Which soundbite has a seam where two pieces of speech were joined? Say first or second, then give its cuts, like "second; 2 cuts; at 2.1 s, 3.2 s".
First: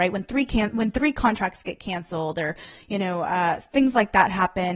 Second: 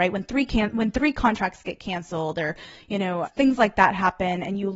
second; 1 cut; at 3.2 s